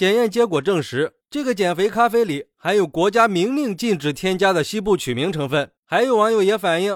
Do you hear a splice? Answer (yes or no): yes